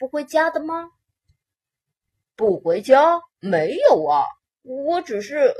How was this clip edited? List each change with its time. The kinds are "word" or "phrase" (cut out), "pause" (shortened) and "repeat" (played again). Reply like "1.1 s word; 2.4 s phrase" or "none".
3.3 s pause; 4.4 s pause

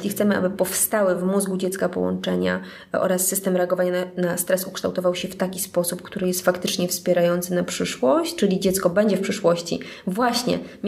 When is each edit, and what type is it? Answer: none

